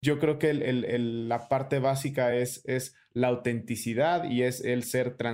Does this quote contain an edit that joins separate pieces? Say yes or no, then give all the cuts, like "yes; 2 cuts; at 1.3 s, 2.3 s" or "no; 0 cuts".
no; 0 cuts